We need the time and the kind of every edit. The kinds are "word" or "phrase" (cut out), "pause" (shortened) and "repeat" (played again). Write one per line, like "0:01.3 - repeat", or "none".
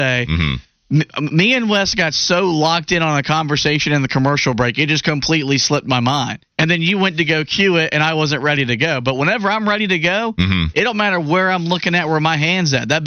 0:06.4 - pause